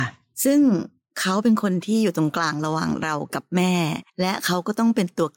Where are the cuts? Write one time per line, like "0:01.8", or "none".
0:04.1